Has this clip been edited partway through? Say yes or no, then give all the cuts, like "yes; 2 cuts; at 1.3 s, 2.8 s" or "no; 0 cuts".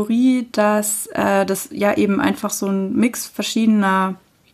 no; 0 cuts